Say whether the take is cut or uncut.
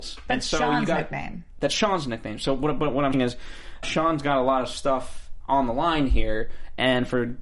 cut